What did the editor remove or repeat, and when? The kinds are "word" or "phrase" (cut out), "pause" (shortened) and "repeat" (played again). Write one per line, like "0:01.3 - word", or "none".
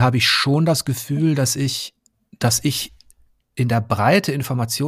none